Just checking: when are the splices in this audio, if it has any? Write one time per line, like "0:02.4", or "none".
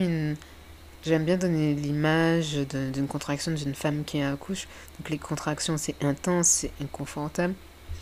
none

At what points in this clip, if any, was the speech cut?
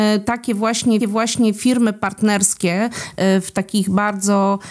0:01.0

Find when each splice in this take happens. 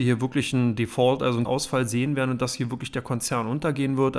0:01.4

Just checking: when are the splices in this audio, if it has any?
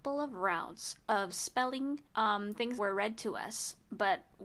0:02.1
0:02.8

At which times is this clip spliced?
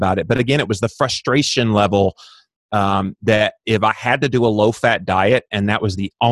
none

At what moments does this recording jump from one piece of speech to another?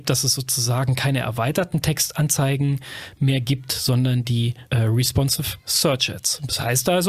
0:04.7

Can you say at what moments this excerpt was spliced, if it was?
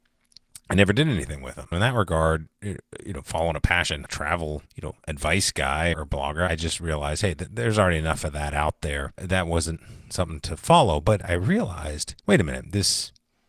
0:02.5
0:04.1
0:04.7
0:05.9
0:12.2

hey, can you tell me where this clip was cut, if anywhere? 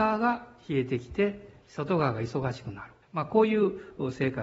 0:03.0

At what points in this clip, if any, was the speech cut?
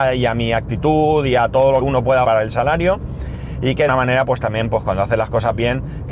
0:01.8
0:02.2
0:03.9

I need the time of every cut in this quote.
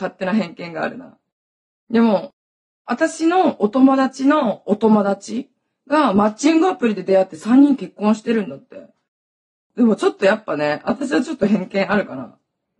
none

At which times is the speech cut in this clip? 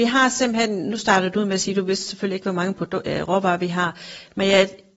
none

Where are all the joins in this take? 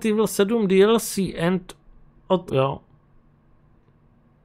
0:02.5

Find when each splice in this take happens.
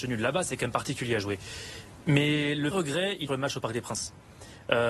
0:02.7
0:03.3

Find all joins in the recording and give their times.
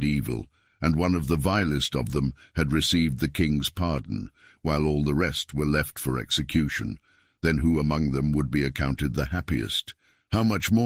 none

